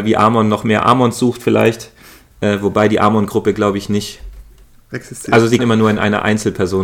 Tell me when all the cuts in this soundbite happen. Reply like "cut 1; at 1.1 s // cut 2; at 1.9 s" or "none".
cut 1; at 5.6 s